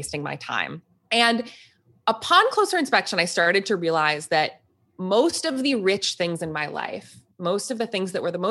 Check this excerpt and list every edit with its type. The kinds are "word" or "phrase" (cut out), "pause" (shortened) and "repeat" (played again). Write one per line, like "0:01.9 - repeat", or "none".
none